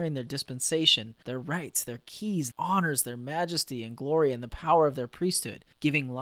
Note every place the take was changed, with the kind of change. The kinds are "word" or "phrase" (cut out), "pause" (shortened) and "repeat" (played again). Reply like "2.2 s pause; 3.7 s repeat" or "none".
2.5 s word